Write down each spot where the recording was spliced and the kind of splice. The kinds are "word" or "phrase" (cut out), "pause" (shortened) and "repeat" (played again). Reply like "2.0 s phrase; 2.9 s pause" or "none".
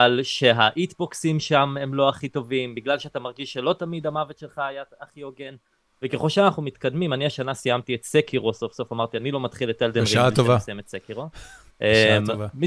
none